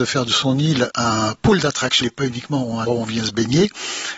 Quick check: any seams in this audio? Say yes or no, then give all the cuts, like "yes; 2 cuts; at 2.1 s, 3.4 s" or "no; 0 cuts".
yes; 3 cuts; at 1.4 s, 2.0 s, 2.9 s